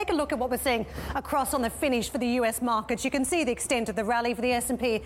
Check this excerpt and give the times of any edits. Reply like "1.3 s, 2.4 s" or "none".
none